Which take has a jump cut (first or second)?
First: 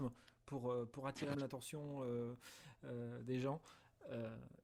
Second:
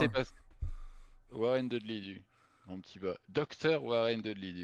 first